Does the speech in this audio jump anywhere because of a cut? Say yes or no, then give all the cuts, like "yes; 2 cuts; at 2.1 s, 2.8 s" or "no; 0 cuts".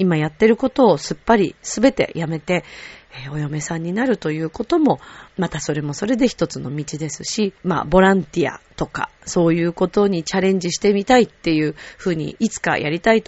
yes; 2 cuts; at 5.3 s, 7.6 s